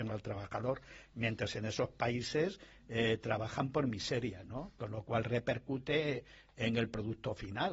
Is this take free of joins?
yes; 0 cuts

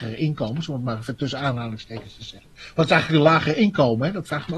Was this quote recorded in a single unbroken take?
yes; 0 cuts

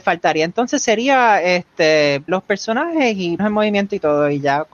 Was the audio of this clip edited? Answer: yes; 2 cuts; at 2.3 s, 3.4 s

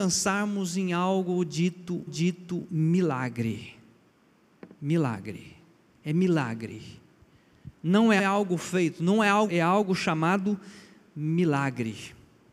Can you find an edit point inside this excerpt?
yes; 5 cuts; at 2.1 s, 5.9 s, 7.7 s, 8.2 s, 9.5 s

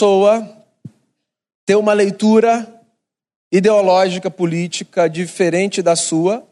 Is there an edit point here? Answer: no; 0 cuts

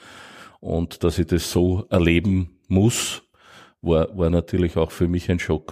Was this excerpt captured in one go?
yes; 0 cuts

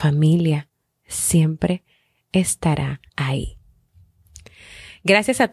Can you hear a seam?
yes; 1 cut; at 3.1 s

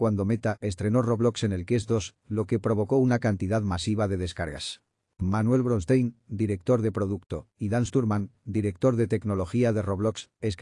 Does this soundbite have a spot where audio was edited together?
no; 0 cuts

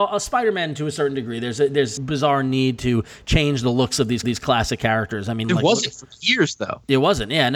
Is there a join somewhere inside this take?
yes; 3 cuts; at 2.0 s, 4.2 s, 5.4 s

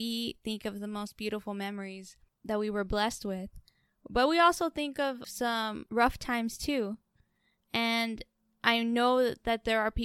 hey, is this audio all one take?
yes; 0 cuts

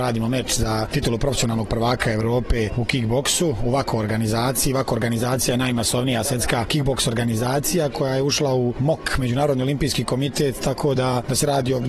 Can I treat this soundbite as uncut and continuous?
yes; 0 cuts

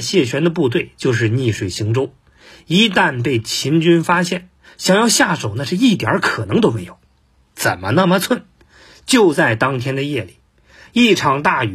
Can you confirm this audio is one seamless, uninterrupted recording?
yes; 0 cuts

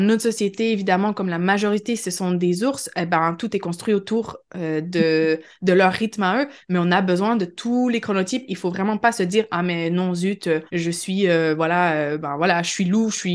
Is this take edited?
yes; 1 cut; at 10.7 s

